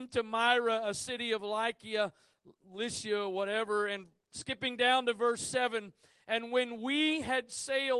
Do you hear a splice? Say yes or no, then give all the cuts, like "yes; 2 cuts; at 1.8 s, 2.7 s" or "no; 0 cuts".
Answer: no; 0 cuts